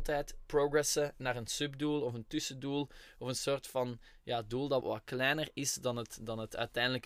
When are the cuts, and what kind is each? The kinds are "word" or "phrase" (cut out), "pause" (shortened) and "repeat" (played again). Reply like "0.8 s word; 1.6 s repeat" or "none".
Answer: 4.8 s word